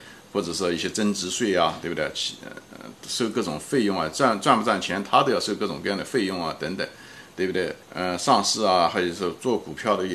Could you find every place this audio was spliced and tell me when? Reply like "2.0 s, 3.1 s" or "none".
7.8 s